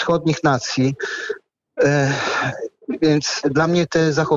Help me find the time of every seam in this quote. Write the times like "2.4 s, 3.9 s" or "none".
none